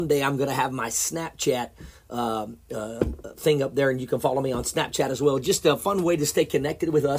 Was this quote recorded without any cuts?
yes; 0 cuts

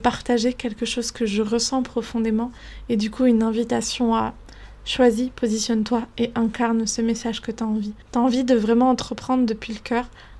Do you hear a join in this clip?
yes; 1 cut; at 8.0 s

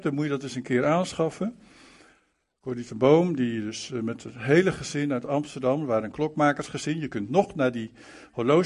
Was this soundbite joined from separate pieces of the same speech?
no; 0 cuts

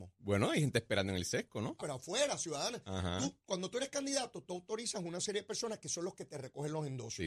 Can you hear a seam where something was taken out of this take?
yes; 1 cut; at 1.8 s

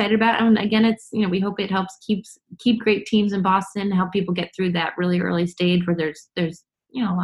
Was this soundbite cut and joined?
no; 0 cuts

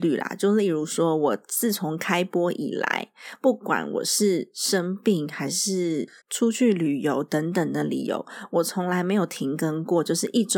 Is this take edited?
yes; 1 cut; at 6.2 s

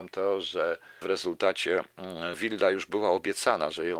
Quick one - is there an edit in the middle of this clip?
yes; 2 cuts; at 1.0 s, 2.3 s

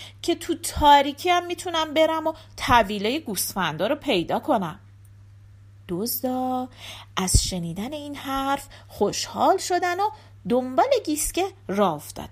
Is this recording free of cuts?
yes; 0 cuts

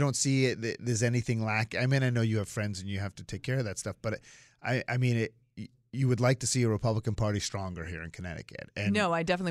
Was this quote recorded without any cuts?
yes; 0 cuts

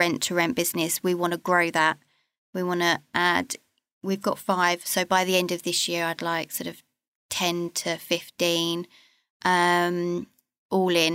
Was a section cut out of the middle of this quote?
no; 0 cuts

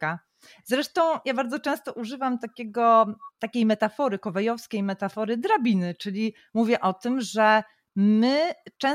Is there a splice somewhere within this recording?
no; 0 cuts

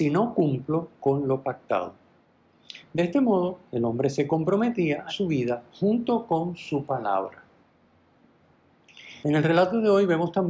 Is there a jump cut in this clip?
yes; 3 cuts; at 3.7 s, 5.1 s, 9.2 s

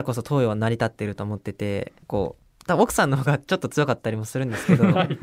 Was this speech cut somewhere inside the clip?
yes; 1 cut; at 2.0 s

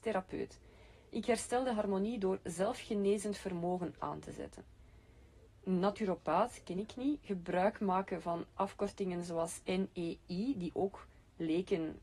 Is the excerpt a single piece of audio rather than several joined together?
yes; 0 cuts

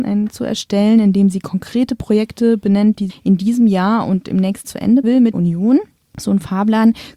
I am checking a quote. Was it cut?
yes; 4 cuts; at 3.1 s, 4.6 s, 5.0 s, 5.3 s

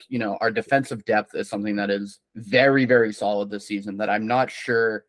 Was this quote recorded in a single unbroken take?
no; 1 cut; at 2.3 s

